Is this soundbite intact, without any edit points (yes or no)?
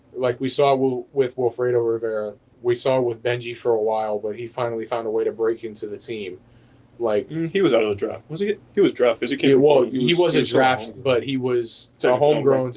yes